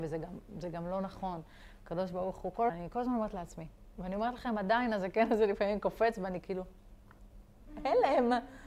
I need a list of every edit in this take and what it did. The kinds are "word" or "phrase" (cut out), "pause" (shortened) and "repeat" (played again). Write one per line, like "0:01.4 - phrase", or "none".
0:02.7 - word